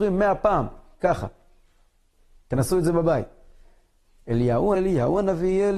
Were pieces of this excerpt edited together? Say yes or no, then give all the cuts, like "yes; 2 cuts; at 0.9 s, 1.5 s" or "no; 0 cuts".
yes; 2 cuts; at 1.0 s, 4.7 s